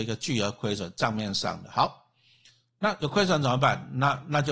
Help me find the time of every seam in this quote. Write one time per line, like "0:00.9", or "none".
0:03.0